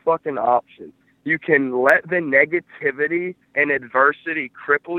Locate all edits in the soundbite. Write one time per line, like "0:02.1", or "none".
0:01.0